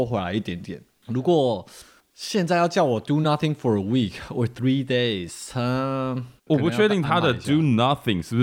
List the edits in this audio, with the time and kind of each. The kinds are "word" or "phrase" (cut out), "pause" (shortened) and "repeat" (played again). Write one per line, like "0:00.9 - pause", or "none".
none